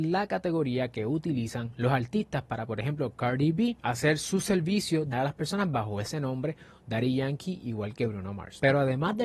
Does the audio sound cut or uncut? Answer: cut